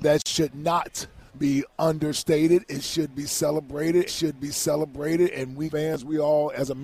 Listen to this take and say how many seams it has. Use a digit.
3